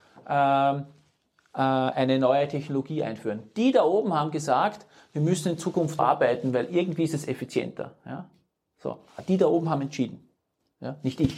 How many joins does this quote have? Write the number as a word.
one